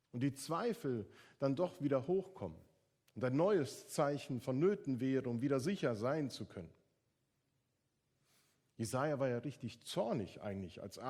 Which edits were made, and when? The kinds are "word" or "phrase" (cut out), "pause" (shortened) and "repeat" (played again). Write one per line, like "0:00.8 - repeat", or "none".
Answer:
none